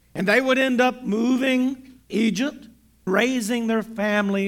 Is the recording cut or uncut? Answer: cut